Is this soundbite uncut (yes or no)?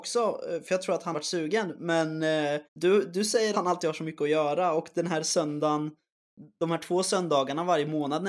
no